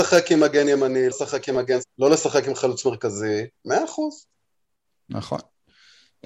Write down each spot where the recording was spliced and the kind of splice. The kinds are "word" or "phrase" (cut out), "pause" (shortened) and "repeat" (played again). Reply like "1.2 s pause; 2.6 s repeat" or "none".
1.1 s word; 1.8 s word; 3.6 s pause